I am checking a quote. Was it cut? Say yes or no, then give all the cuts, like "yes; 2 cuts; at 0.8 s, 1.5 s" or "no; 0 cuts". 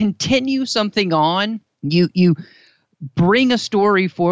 yes; 1 cut; at 1.8 s